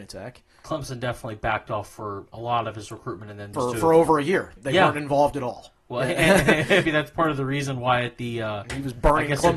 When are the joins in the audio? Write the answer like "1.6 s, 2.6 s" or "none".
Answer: 3.5 s, 4.6 s, 6.8 s